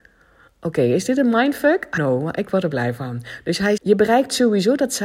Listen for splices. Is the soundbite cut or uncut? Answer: cut